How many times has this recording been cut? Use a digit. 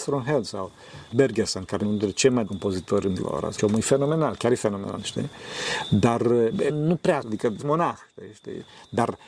9